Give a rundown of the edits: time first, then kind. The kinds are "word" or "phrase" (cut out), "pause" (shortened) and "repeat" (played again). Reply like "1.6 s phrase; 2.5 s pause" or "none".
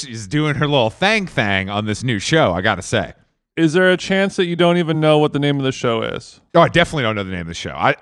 none